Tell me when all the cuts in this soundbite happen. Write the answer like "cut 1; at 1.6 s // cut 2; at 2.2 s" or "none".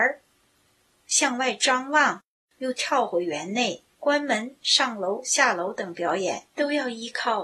cut 1; at 3.9 s